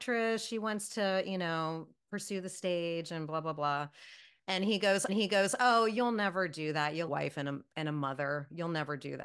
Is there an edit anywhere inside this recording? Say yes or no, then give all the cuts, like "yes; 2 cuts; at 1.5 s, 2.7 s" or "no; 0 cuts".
yes; 2 cuts; at 5.1 s, 7.1 s